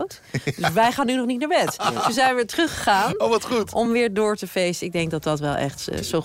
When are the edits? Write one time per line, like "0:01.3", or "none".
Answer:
none